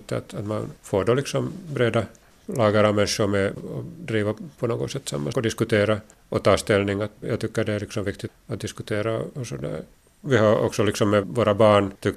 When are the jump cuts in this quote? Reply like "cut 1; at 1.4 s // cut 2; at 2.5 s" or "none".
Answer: cut 1; at 3.6 s // cut 2; at 5.3 s // cut 3; at 7.2 s // cut 4; at 8.3 s